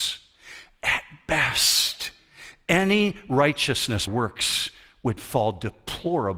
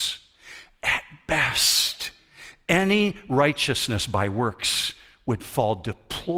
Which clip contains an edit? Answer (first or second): first